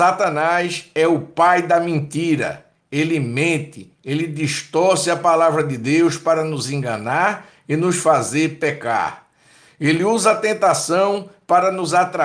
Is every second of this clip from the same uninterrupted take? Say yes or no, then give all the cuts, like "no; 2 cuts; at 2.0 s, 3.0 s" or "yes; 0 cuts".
yes; 0 cuts